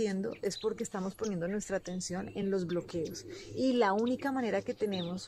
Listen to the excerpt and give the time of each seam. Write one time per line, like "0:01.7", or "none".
none